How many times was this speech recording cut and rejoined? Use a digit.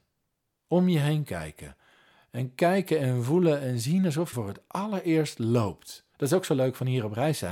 2